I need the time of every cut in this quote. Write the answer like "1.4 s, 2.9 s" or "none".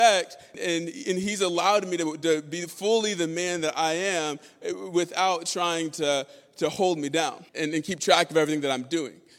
7.5 s